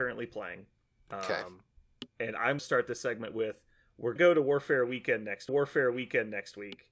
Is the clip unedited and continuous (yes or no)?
no